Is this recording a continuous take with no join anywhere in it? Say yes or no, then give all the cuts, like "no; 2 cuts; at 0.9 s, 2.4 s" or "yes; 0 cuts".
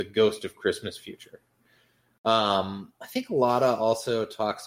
yes; 0 cuts